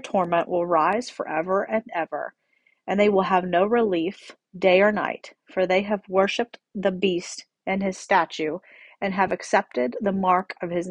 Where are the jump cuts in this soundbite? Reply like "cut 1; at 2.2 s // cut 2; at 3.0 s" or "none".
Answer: none